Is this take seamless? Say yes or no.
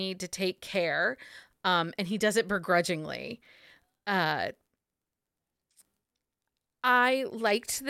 yes